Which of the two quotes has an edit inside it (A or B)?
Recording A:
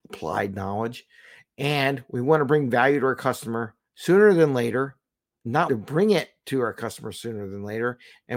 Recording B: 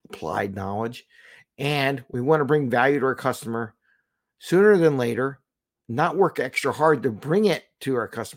A